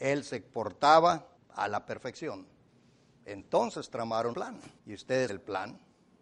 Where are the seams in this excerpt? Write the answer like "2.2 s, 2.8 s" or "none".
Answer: 1.4 s, 2.7 s, 4.3 s, 4.8 s, 5.3 s